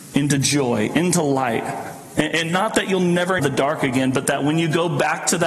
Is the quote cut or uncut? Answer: cut